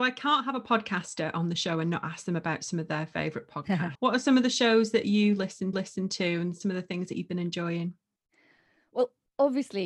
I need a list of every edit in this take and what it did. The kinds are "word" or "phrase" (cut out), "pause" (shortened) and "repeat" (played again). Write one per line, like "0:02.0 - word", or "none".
0:03.9 - word
0:05.7 - repeat